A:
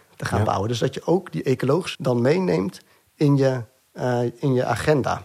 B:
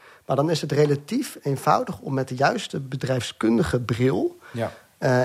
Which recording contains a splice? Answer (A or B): A